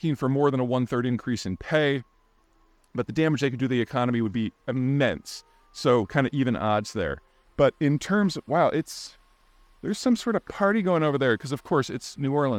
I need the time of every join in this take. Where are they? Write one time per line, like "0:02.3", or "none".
none